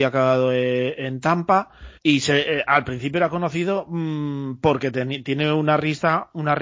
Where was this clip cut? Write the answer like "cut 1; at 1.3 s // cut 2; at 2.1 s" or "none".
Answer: cut 1; at 2.0 s